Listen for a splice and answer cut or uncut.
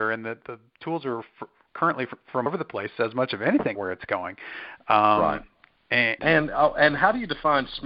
cut